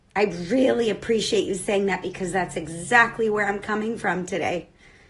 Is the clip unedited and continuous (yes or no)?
yes